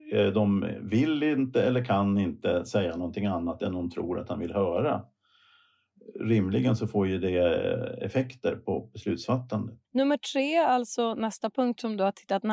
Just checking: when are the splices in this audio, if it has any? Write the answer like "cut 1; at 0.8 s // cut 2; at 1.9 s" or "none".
cut 1; at 9.8 s

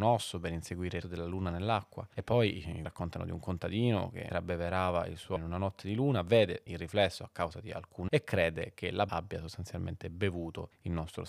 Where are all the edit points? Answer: cut 1; at 1.0 s // cut 2; at 2.8 s // cut 3; at 4.3 s // cut 4; at 5.4 s // cut 5; at 6.7 s // cut 6; at 8.1 s // cut 7; at 9.1 s

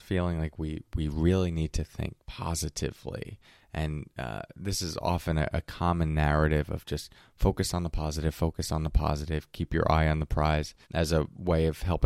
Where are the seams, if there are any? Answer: cut 1; at 2.2 s // cut 2; at 10.8 s

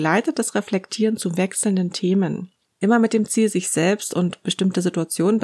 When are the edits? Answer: none

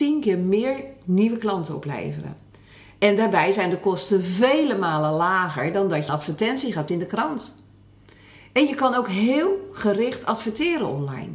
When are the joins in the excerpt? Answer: cut 1; at 6.1 s // cut 2; at 6.9 s

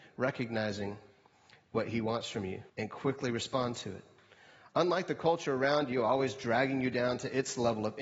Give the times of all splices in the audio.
cut 1; at 2.7 s

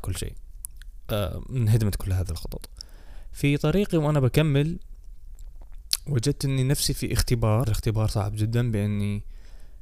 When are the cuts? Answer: cut 1; at 7.6 s

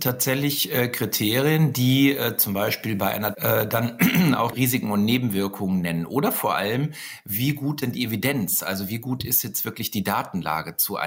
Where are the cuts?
cut 1; at 3.3 s // cut 2; at 4.5 s // cut 3; at 7.8 s

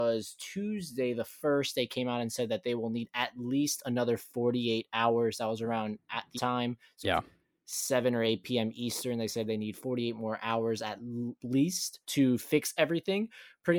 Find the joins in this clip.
cut 1; at 6.4 s // cut 2; at 7.0 s // cut 3; at 12.0 s

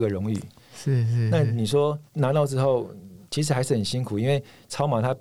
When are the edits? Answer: cut 1; at 2.1 s // cut 2; at 3.2 s

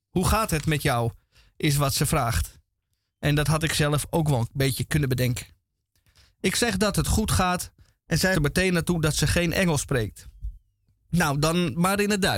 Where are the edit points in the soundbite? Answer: cut 1; at 8.3 s

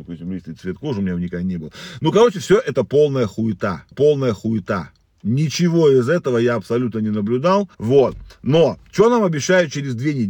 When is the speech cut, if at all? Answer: cut 1; at 3.9 s // cut 2; at 7.7 s

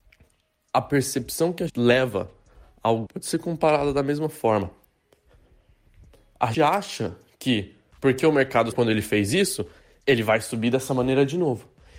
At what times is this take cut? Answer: cut 1; at 1.7 s // cut 2; at 3.1 s // cut 3; at 6.5 s // cut 4; at 7.9 s // cut 5; at 8.7 s

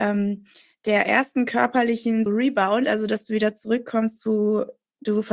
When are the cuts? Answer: cut 1; at 2.3 s

